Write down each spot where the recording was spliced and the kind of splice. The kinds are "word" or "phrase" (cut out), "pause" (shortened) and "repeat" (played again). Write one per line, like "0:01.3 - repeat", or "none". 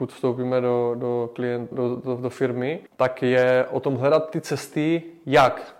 0:01.7 - word
0:02.9 - pause